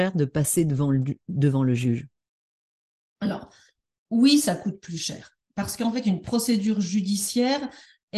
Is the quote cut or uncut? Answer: uncut